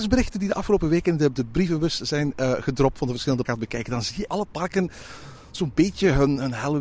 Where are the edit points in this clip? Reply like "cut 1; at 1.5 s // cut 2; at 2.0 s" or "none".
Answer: cut 1; at 1.3 s // cut 2; at 3.4 s // cut 3; at 4.3 s